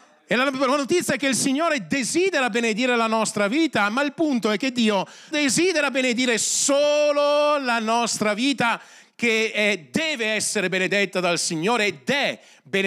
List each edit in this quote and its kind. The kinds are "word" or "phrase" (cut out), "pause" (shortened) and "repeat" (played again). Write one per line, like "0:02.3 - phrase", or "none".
0:05.3 - word